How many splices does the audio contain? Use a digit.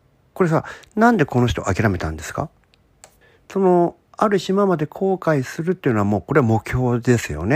1